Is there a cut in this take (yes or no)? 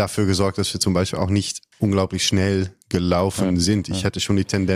yes